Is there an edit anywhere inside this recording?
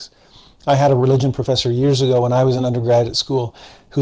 no; 0 cuts

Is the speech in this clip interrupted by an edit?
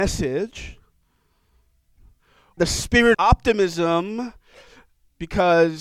yes; 2 cuts; at 2.6 s, 3.1 s

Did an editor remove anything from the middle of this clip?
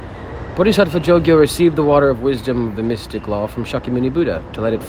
no; 0 cuts

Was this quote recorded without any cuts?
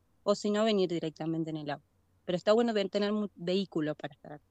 yes; 0 cuts

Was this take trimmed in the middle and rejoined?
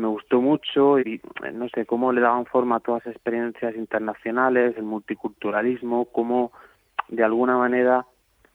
yes; 1 cut; at 1.0 s

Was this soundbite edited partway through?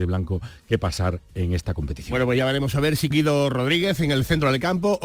yes; 1 cut; at 3.1 s

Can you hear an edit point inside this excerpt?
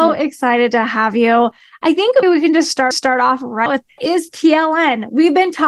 yes; 4 cuts; at 2.2 s, 2.9 s, 3.7 s, 4.0 s

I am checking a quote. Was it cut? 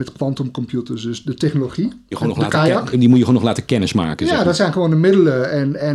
yes; 2 cuts; at 2.1 s, 2.9 s

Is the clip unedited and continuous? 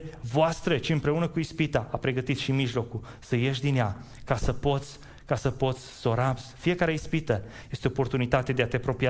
yes; 0 cuts

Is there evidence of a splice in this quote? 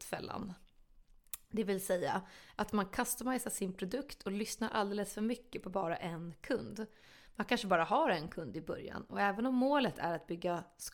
no; 0 cuts

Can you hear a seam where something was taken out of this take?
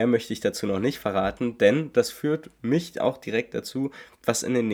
no; 0 cuts

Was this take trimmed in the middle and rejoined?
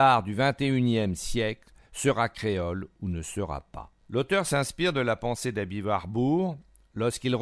yes; 1 cut; at 4.0 s

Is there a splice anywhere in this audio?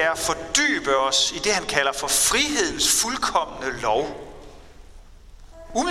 no; 0 cuts

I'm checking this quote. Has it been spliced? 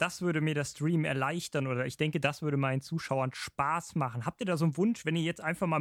no; 0 cuts

